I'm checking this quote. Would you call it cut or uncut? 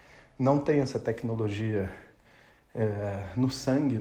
uncut